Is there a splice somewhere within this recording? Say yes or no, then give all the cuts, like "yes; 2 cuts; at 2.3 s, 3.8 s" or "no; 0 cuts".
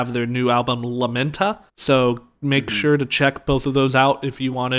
yes; 1 cut; at 1.7 s